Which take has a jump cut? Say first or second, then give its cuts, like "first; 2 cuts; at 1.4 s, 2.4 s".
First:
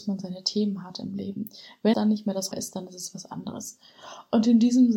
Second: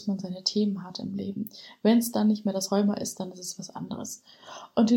first; 2 cuts; at 1.9 s, 2.5 s